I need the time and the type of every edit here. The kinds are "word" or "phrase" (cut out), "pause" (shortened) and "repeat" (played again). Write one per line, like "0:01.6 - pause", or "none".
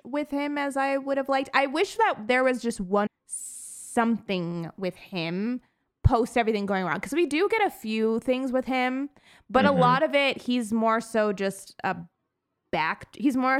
0:03.1 - word